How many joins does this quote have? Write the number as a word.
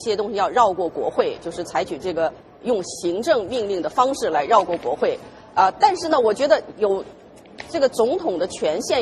zero